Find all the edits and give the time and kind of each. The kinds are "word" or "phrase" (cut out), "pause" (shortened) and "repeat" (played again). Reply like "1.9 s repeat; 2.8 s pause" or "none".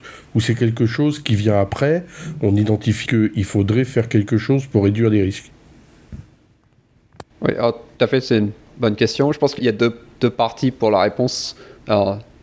3.1 s word; 7.3 s pause; 9.6 s word